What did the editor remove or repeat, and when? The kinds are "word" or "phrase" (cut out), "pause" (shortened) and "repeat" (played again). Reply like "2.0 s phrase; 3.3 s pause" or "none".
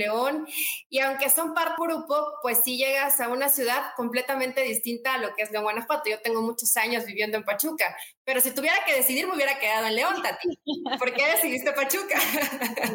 1.8 s phrase